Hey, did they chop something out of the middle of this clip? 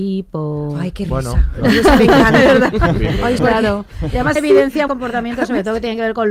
yes; 3 cuts; at 3.4 s, 4.4 s, 4.9 s

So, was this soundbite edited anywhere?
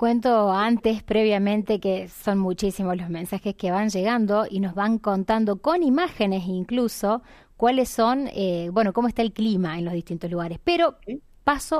no; 0 cuts

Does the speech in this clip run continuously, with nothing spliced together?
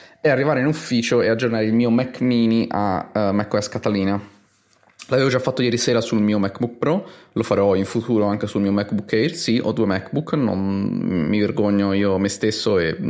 yes; 0 cuts

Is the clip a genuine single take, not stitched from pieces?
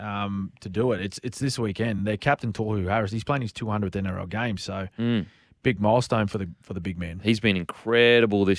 yes; 0 cuts

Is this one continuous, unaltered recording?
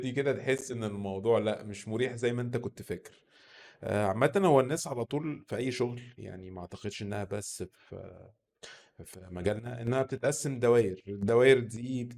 yes; 0 cuts

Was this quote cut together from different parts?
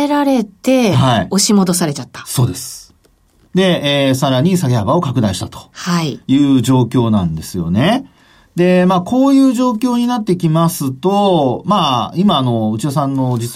no; 0 cuts

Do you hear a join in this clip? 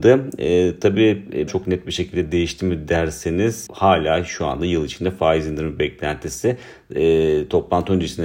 yes; 2 cuts; at 1.5 s, 3.7 s

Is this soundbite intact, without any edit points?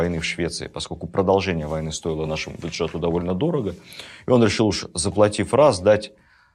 yes; 0 cuts

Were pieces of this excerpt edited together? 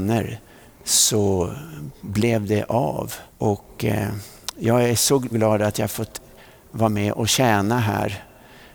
yes; 2 cuts; at 3.3 s, 5.3 s

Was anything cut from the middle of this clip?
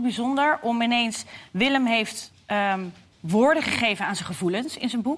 no; 0 cuts

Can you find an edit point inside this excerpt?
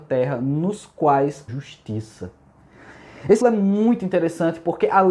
yes; 2 cuts; at 1.5 s, 3.4 s

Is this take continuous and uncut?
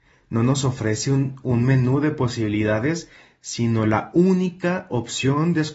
yes; 0 cuts

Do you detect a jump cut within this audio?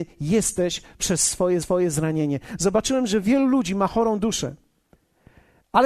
yes; 1 cut; at 1.6 s

